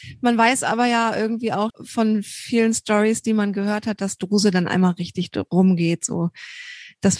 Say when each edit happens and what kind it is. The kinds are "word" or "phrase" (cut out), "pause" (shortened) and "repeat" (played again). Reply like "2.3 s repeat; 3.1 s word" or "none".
1.7 s word